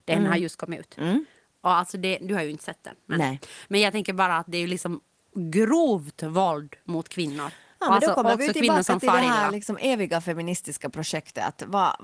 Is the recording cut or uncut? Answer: uncut